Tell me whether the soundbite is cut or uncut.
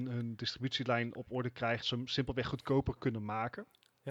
cut